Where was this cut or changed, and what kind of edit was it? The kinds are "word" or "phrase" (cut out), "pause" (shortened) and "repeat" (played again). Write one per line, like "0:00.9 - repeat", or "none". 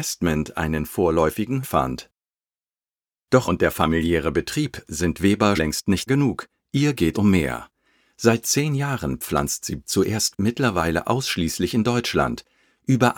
0:01.6 - word
0:03.5 - word
0:05.6 - word
0:06.1 - word
0:07.1 - word
0:08.4 - word
0:09.8 - word
0:10.3 - word

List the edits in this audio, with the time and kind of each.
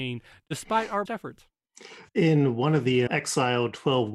0:01.1 - word
0:02.1 - pause
0:03.1 - word

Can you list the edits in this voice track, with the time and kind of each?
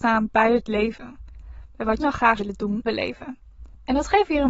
0:02.0 - word
0:02.4 - word
0:02.8 - word

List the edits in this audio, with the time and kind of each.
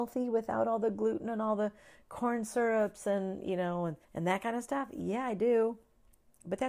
0:04.0 - pause

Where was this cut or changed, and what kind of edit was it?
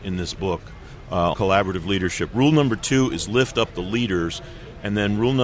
0:01.3 - word

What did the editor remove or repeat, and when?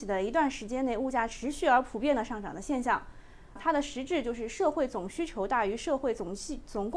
0:03.6 - word

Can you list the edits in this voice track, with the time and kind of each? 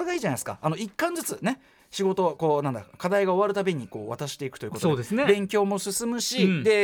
none

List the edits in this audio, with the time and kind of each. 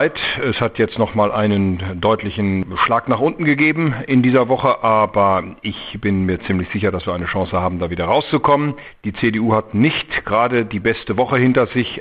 none

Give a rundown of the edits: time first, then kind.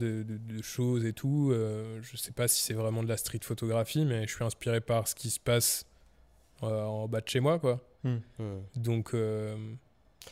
none

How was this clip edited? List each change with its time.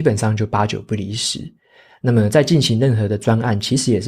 none

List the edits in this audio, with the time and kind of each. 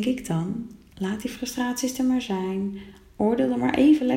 none

